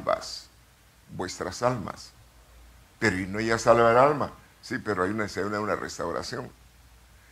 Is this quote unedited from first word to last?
yes; 0 cuts

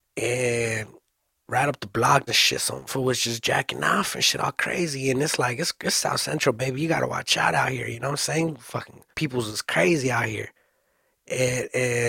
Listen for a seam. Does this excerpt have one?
yes; 3 cuts; at 2.3 s, 2.9 s, 9.1 s

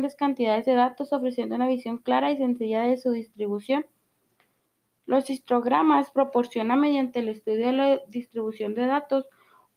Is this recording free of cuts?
yes; 0 cuts

